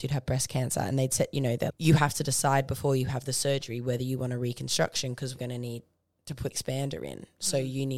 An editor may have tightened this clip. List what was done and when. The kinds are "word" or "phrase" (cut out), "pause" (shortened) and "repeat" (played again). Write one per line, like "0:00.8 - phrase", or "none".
0:01.7 - word
0:05.4 - word
0:06.5 - word